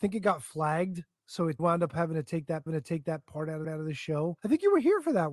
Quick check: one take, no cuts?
no; 4 cuts; at 1.6 s, 2.7 s, 3.6 s, 4.4 s

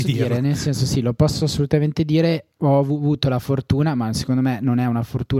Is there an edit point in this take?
no; 0 cuts

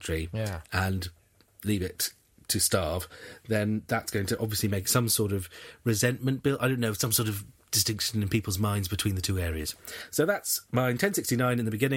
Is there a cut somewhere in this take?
no; 0 cuts

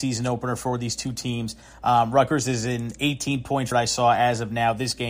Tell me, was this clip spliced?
yes; 1 cut; at 3.7 s

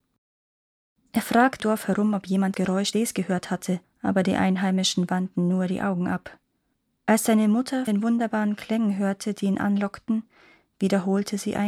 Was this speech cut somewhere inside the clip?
yes; 6 cuts; at 1.6 s, 2.5 s, 2.9 s, 3.8 s, 6.7 s, 7.9 s

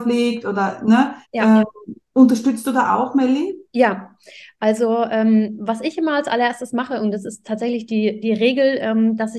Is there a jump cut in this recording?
yes; 2 cuts; at 1.2 s, 3.7 s

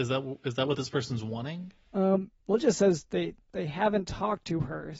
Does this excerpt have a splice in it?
yes; 2 cuts; at 2.4 s, 3.4 s

